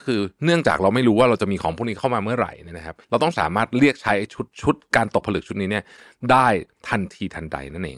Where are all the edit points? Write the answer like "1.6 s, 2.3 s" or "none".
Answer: 3.0 s, 4.5 s